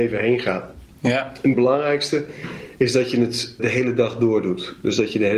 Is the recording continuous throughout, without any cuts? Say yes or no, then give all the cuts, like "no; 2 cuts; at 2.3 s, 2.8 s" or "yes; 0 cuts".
no; 2 cuts; at 1.5 s, 3.6 s